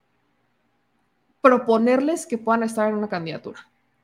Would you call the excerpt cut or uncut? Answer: uncut